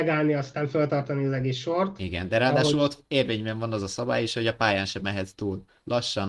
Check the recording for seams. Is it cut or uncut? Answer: uncut